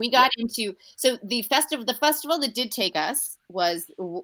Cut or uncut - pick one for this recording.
uncut